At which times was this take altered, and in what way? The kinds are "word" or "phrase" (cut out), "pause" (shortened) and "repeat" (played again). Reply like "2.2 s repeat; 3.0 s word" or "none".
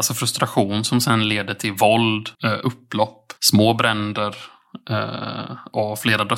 2.3 s pause; 3.4 s pause